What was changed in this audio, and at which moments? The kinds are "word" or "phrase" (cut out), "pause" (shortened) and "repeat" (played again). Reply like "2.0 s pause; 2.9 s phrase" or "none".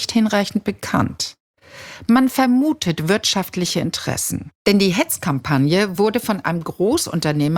none

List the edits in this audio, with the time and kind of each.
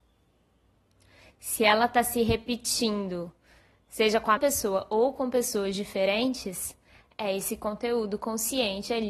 4.4 s word

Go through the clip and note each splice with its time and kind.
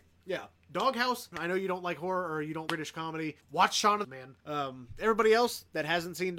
1.3 s word; 2.7 s word; 3.4 s pause; 4.0 s phrase; 4.4 s pause

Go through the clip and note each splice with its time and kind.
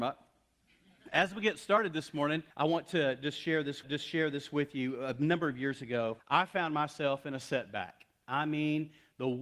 2.5 s pause; 3.8 s repeat; 6.2 s pause

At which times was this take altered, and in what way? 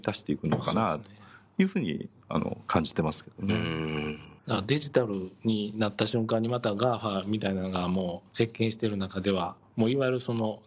4.4 s pause; 8.3 s pause

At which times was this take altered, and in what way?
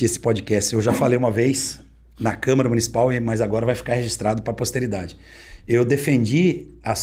none

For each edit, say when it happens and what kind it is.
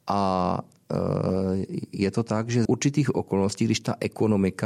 2.7 s word

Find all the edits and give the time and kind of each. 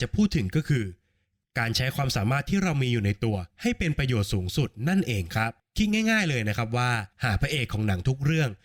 3.5 s pause; 5.6 s pause; 7.1 s pause

